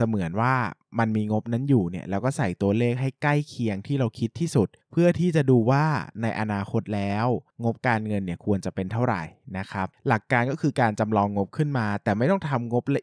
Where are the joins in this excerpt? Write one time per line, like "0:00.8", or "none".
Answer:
none